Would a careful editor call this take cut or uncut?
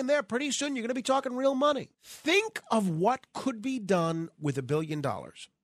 cut